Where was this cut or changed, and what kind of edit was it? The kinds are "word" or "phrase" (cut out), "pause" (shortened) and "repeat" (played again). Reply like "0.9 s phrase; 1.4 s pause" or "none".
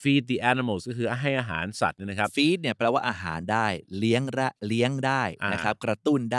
none